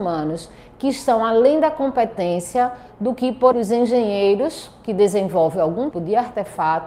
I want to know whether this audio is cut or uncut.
cut